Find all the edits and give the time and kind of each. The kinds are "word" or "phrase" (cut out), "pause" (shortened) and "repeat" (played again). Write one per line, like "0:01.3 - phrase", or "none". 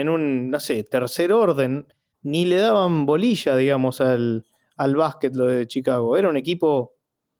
none